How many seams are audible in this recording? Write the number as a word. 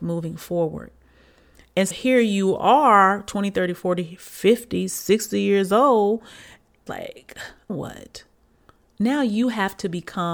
three